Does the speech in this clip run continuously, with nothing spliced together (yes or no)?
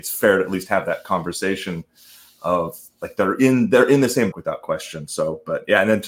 no